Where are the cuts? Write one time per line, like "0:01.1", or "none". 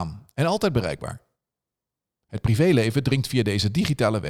none